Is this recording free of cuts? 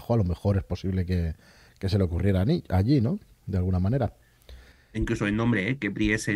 yes; 0 cuts

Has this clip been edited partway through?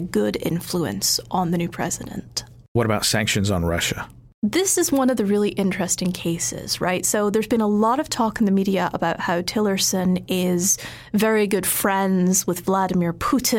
no; 0 cuts

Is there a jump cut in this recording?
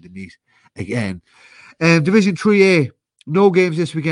no; 0 cuts

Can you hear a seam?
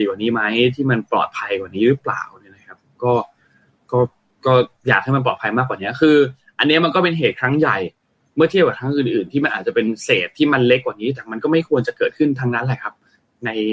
no; 0 cuts

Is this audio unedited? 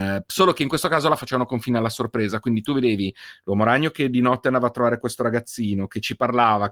yes; 0 cuts

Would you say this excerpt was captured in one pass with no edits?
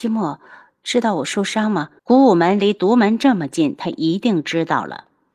no; 1 cut; at 2.0 s

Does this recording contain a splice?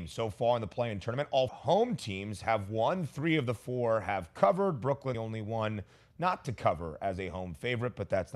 yes; 2 cuts; at 1.5 s, 5.1 s

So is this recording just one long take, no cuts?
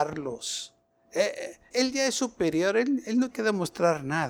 no; 2 cuts; at 1.7 s, 3.3 s

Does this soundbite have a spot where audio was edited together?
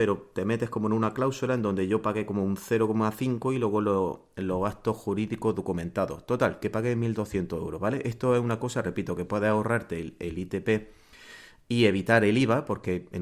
no; 0 cuts

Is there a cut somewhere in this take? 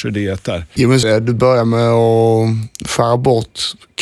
yes; 1 cut; at 1.0 s

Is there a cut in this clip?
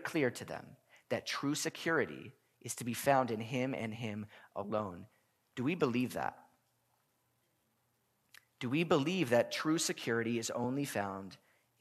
no; 0 cuts

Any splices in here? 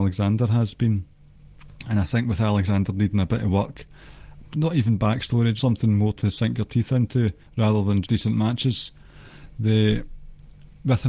yes; 2 cuts; at 5.6 s, 8.0 s

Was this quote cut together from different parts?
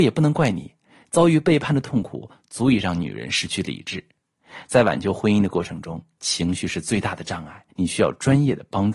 yes; 1 cut; at 7.7 s

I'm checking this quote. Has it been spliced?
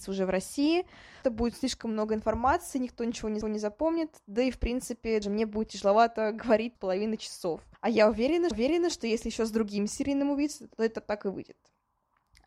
yes; 6 cuts; at 1.2 s, 3.4 s, 5.2 s, 6.7 s, 7.7 s, 8.5 s

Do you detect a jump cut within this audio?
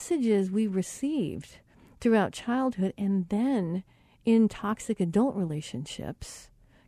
no; 0 cuts

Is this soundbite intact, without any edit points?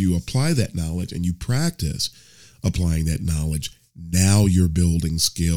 yes; 0 cuts

